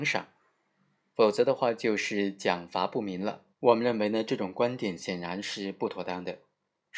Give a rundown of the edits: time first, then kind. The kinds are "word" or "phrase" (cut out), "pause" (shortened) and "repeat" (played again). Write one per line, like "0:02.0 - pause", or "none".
0:03.5 - pause